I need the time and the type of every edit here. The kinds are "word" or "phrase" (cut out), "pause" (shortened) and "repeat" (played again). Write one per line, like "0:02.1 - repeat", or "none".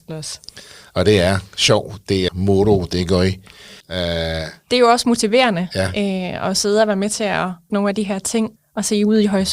0:02.3 - word
0:03.8 - pause
0:07.7 - phrase
0:08.6 - word